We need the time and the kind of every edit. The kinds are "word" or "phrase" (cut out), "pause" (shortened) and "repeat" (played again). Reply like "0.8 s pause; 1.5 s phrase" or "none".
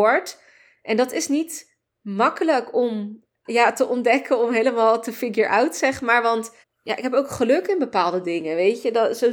1.9 s pause; 3.4 s pause; 6.6 s pause